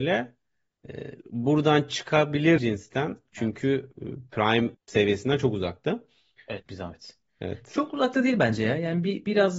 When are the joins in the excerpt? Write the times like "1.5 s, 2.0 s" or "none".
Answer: 1.2 s, 2.6 s, 4.7 s, 6.6 s